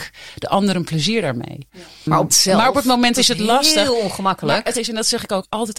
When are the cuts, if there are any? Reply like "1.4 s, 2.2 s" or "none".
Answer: 2.3 s, 3.1 s, 4.7 s